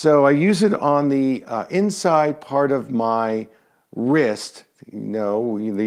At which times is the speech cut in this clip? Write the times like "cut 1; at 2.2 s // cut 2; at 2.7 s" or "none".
none

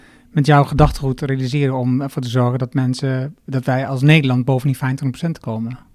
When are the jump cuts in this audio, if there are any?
none

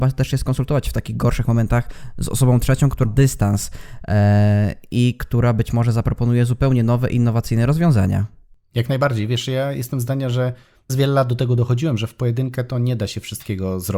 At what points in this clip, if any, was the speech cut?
cut 1; at 3.0 s // cut 2; at 10.9 s

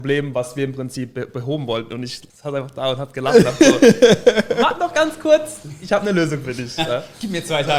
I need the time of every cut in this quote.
cut 1; at 2.3 s

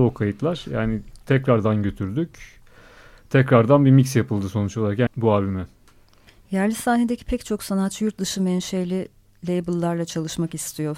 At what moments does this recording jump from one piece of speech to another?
cut 1; at 5.1 s

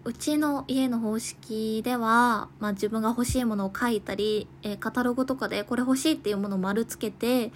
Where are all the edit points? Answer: none

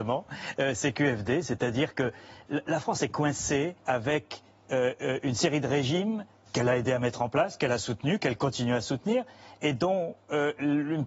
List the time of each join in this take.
cut 1; at 3.8 s // cut 2; at 6.5 s

